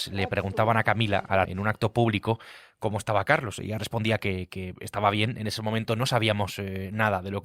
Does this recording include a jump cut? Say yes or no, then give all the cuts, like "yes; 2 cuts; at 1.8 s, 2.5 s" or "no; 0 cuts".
yes; 1 cut; at 1.4 s